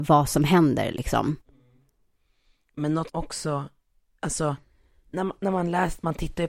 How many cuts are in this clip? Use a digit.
1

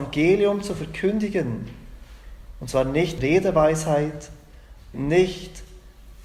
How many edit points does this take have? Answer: 2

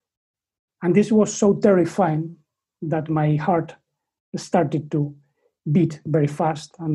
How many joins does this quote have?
0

